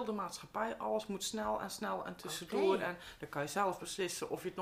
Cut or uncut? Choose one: uncut